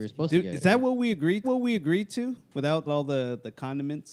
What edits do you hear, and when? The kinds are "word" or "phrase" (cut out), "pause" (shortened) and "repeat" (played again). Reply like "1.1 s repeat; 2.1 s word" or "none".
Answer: 1.4 s repeat; 2.9 s word